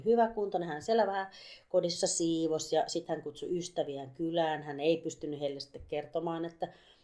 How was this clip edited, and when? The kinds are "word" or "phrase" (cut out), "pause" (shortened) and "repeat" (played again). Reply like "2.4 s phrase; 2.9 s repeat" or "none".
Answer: none